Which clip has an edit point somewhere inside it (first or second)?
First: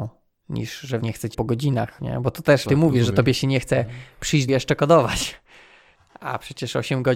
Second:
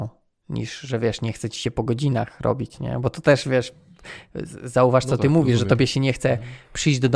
first